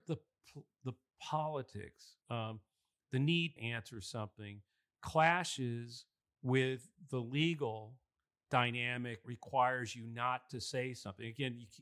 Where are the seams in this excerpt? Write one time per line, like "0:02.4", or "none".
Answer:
0:02.2
0:03.6
0:06.2
0:09.2